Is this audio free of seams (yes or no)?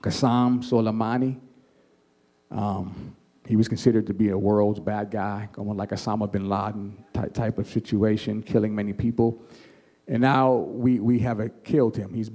yes